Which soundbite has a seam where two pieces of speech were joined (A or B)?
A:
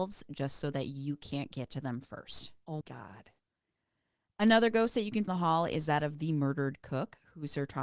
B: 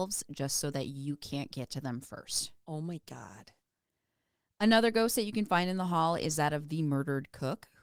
A